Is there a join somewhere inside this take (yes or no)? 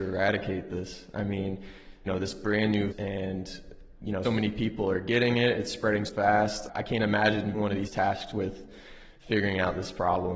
yes